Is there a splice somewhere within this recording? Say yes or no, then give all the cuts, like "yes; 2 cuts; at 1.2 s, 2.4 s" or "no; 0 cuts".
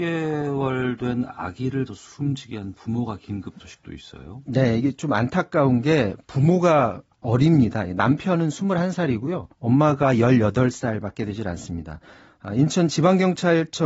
yes; 4 cuts; at 1.9 s, 3.6 s, 7.1 s, 9.5 s